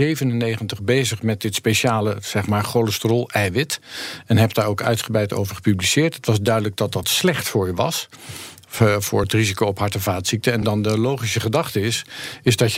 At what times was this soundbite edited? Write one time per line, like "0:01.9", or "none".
none